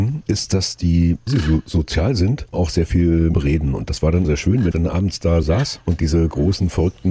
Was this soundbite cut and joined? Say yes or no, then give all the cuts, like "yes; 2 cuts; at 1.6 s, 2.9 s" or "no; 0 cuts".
yes; 6 cuts; at 1.3 s, 2.5 s, 3.3 s, 4.2 s, 4.7 s, 5.4 s